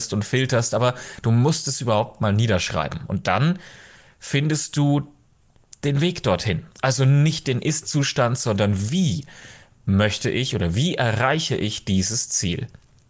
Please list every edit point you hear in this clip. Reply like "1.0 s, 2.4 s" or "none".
none